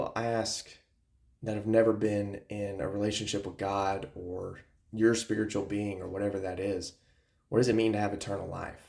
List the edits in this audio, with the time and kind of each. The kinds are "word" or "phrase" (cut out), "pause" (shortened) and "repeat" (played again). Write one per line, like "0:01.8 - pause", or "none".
none